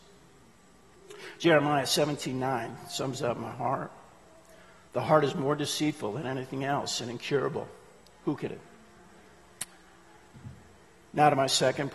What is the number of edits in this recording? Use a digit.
1